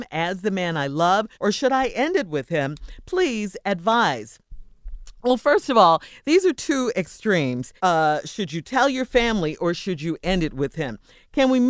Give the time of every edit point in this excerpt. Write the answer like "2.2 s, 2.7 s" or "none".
1.3 s, 7.8 s